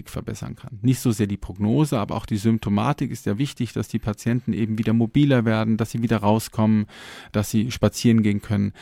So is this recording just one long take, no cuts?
yes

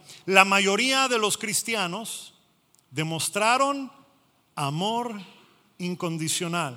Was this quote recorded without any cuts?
yes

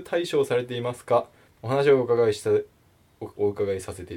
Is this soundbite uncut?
no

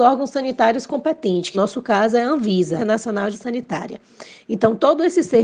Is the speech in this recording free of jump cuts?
no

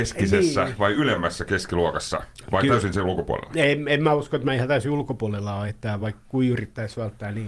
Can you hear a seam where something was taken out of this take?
no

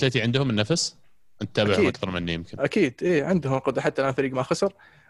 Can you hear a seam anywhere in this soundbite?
no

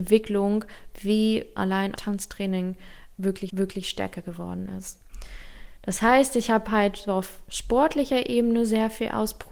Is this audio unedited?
no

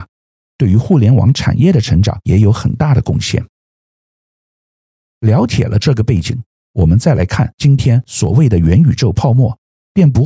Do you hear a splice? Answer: no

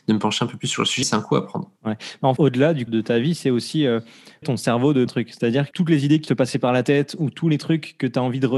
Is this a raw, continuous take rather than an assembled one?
no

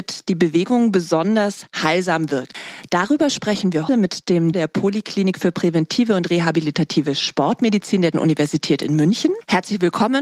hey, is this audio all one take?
no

